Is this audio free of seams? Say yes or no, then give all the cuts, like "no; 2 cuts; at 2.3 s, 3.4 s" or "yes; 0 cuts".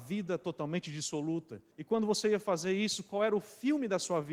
no; 1 cut; at 1.7 s